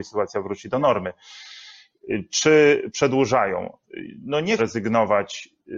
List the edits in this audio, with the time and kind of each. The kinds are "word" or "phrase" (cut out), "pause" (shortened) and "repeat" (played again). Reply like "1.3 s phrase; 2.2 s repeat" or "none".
4.6 s word